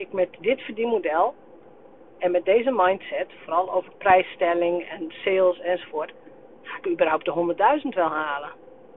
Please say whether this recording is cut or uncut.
uncut